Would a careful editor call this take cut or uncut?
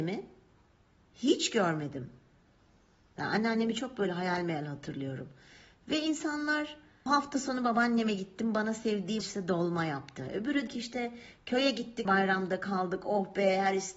cut